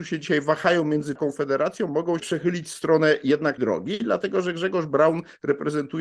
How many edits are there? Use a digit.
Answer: 3